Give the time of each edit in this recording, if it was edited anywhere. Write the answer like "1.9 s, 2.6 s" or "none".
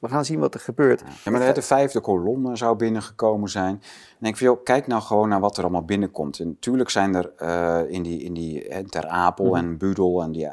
none